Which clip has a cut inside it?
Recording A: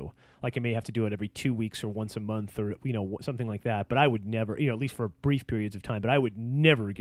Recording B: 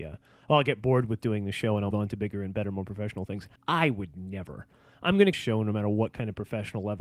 B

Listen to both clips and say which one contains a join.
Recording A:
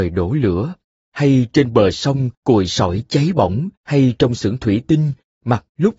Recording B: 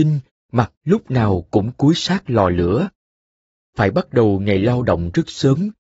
A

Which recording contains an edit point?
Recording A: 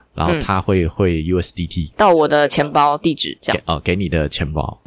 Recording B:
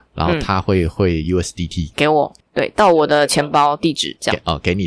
A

